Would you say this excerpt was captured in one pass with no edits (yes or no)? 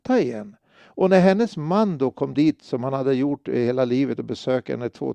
yes